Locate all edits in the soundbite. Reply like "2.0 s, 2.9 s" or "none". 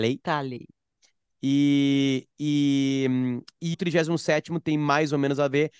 3.7 s